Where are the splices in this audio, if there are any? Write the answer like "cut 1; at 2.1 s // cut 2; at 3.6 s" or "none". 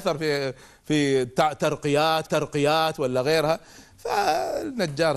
cut 1; at 2.3 s